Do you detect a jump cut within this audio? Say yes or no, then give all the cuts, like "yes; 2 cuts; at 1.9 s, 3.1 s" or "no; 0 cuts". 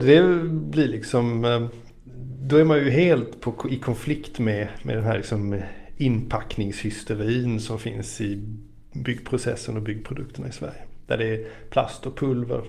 no; 0 cuts